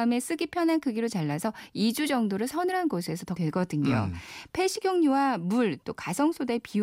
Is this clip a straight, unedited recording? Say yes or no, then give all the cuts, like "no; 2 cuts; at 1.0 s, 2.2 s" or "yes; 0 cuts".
no; 1 cut; at 3.4 s